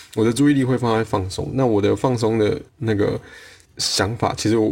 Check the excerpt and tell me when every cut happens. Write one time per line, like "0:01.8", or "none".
0:02.7
0:03.7